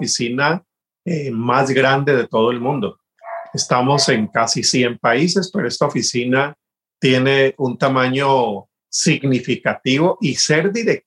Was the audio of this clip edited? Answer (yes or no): no